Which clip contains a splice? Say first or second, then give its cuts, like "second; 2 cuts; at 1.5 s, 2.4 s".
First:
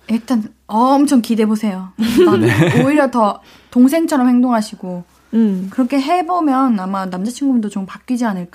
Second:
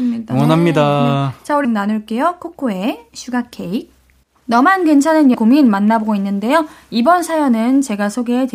second; 3 cuts; at 1.6 s, 4.2 s, 5.3 s